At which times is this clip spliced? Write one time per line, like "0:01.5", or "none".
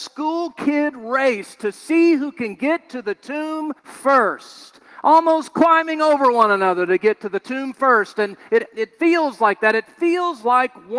0:03.8